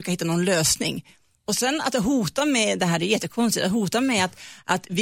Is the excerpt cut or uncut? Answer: uncut